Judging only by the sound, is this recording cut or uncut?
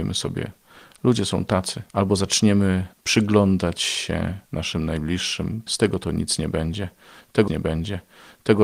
cut